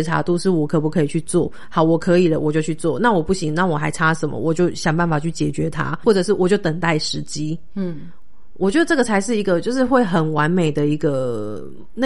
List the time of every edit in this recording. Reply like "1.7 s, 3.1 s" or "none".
6.0 s